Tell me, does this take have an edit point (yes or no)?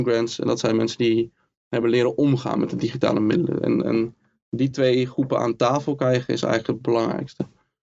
no